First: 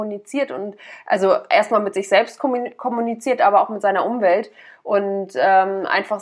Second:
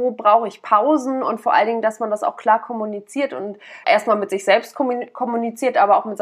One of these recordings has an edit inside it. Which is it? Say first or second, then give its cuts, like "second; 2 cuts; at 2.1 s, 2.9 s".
second; 1 cut; at 3.8 s